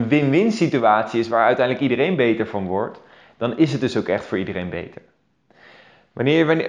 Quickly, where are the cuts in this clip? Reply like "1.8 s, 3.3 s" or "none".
none